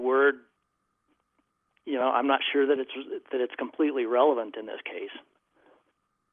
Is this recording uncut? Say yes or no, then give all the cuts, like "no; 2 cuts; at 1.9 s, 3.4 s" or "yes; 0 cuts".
yes; 0 cuts